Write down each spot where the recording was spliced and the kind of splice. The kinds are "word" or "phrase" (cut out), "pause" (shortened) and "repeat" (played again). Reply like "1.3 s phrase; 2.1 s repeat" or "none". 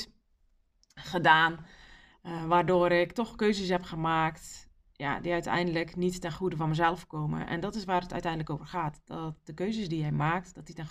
none